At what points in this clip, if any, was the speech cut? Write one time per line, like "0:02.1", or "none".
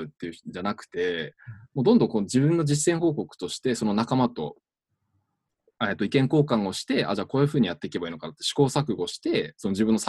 none